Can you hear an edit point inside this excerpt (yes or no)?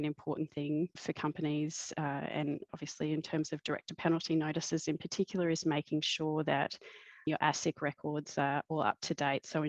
yes